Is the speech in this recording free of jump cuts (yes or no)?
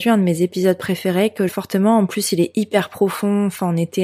no